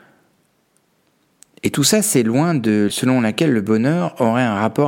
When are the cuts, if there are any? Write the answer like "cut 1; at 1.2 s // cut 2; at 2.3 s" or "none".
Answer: cut 1; at 2.9 s